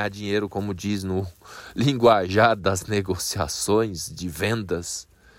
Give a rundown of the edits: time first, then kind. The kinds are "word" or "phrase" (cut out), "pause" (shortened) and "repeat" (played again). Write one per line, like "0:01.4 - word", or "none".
none